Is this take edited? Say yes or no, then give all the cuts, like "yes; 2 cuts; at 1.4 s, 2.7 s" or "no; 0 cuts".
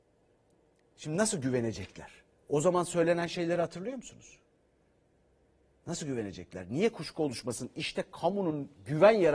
no; 0 cuts